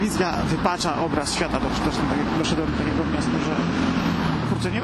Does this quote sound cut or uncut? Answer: uncut